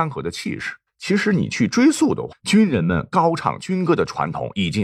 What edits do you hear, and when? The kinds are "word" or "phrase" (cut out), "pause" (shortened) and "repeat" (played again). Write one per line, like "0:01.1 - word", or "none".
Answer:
0:02.3 - word